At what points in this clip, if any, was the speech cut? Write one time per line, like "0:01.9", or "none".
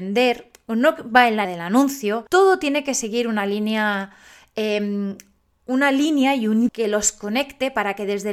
0:01.4
0:02.3
0:06.7